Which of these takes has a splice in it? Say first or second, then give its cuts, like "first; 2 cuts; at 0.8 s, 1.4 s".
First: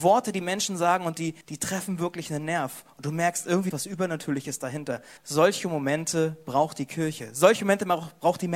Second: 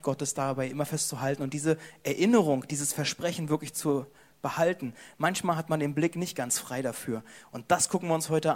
first; 3 cuts; at 1.4 s, 3.7 s, 5.2 s